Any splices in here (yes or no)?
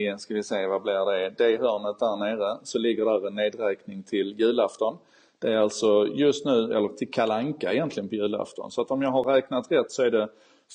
no